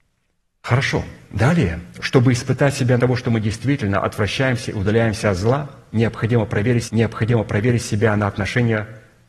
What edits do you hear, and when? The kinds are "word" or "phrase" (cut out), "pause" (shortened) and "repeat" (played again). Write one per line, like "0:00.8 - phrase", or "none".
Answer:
0:03.0 - word
0:06.9 - repeat